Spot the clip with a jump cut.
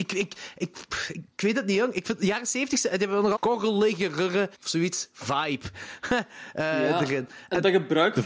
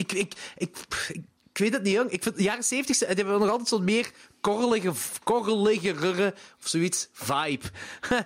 first; 3 cuts; at 1.3 s, 3.4 s, 4.5 s

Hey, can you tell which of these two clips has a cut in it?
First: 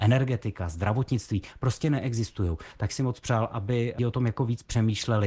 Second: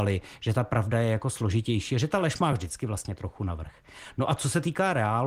first; 2 cuts; at 2.9 s, 4.0 s

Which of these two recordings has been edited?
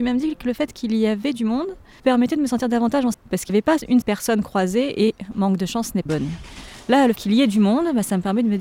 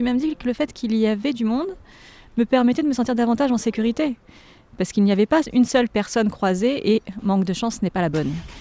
first; 6 cuts; at 2.0 s, 3.1 s, 3.5 s, 4.0 s, 6.1 s, 7.2 s

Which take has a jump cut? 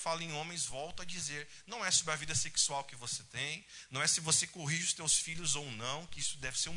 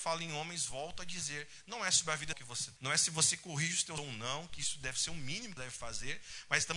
second; 4 cuts; at 2.3 s, 2.8 s, 4.0 s, 5.6 s

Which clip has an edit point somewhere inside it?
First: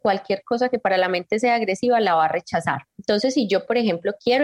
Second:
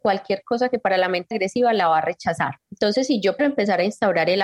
second; 2 cuts; at 1.3 s, 3.4 s

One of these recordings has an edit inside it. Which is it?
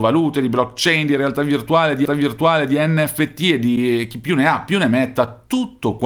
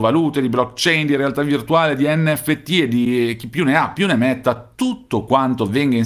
first; 1 cut; at 2.1 s

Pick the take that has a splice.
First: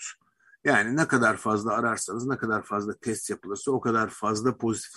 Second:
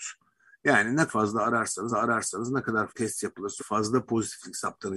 second; 4 cuts; at 1.1 s, 1.9 s, 2.9 s, 3.6 s

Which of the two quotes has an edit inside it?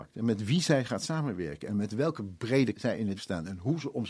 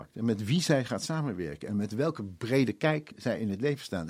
first; 2 cuts; at 2.7 s, 3.2 s

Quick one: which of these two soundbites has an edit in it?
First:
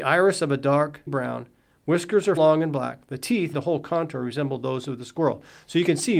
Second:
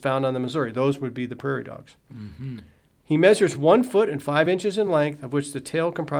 first; 3 cuts; at 1.1 s, 2.4 s, 3.5 s

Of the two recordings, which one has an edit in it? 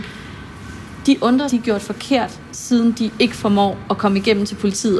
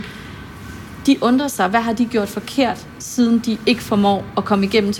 first; 1 cut; at 1.5 s

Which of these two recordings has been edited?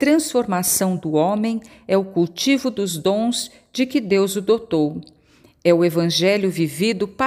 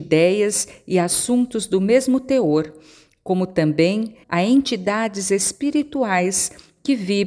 second; 1 cut; at 4.2 s

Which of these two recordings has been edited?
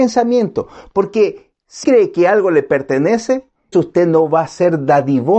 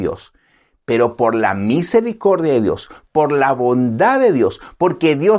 first; 2 cuts; at 1.8 s, 3.7 s

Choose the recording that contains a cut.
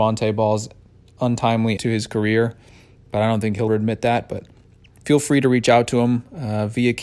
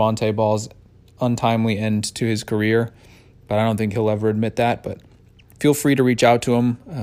first; 2 cuts; at 1.8 s, 3.7 s

